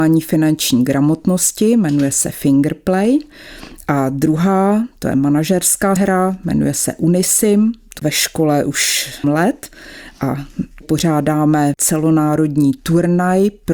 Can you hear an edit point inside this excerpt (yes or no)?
yes